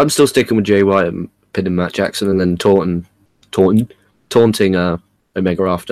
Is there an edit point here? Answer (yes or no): no